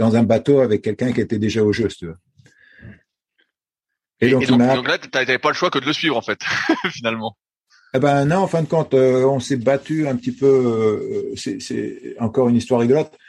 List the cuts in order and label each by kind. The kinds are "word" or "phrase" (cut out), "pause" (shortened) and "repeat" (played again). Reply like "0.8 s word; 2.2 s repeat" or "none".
none